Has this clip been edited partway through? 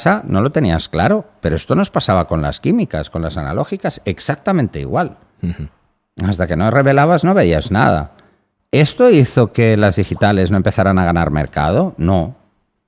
no; 0 cuts

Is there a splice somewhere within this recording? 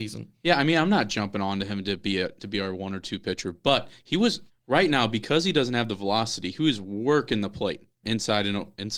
yes; 3 cuts; at 2.4 s, 4.5 s, 8.0 s

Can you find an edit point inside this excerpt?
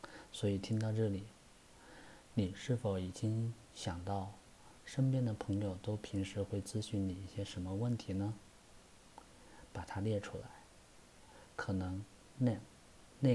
no; 0 cuts

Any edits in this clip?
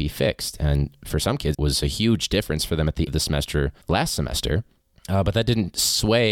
yes; 4 cuts; at 1.5 s, 3.1 s, 3.8 s, 4.8 s

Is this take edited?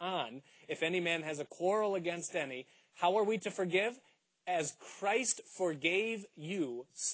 no; 0 cuts

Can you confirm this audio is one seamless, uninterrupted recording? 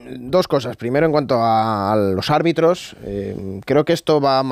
yes; 0 cuts

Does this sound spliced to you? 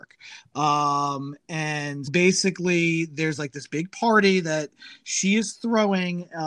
yes; 1 cut; at 2.1 s

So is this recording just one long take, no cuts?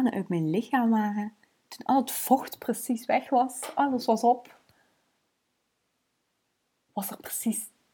yes; 0 cuts

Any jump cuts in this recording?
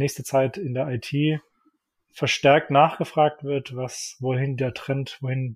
no; 0 cuts

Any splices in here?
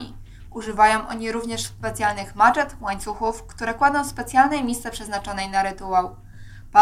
no; 0 cuts

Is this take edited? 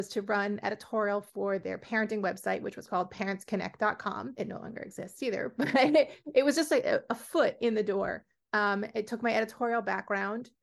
no; 0 cuts

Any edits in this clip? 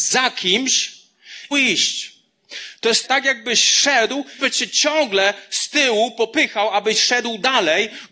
yes; 3 cuts; at 1.5 s, 3.0 s, 4.4 s

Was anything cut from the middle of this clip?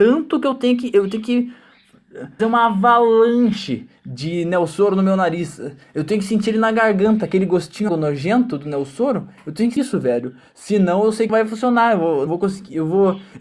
yes; 5 cuts; at 2.4 s, 7.9 s, 9.8 s, 11.3 s, 12.3 s

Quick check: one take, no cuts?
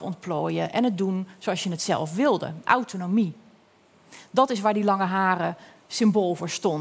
yes; 0 cuts

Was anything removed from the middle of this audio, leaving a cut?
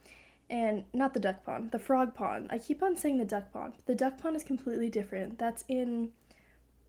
no; 0 cuts

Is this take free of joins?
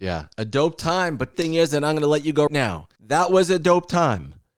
no; 3 cuts; at 1.3 s, 2.5 s, 3.0 s

